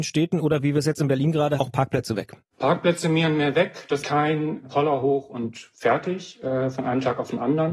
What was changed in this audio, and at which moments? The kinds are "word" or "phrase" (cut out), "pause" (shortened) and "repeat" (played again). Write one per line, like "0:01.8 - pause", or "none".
0:01.6 - phrase
0:02.4 - pause
0:04.0 - phrase
0:04.6 - word